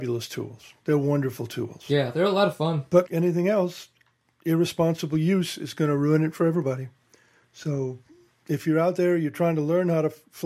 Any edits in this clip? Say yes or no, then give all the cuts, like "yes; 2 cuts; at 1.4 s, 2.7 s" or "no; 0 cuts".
yes; 1 cut; at 3.0 s